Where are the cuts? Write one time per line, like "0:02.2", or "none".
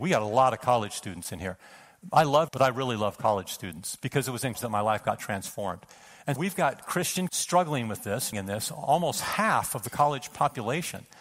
0:02.5
0:04.5
0:06.4
0:07.3
0:08.3